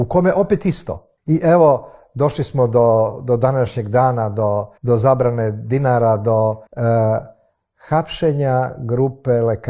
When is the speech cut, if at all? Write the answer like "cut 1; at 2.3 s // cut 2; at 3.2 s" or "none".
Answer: cut 1; at 1.2 s // cut 2; at 4.8 s // cut 3; at 6.7 s